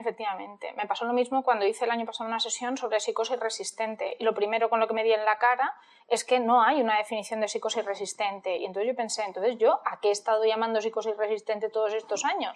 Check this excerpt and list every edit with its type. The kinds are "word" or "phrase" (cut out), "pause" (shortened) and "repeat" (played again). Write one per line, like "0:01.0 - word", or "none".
none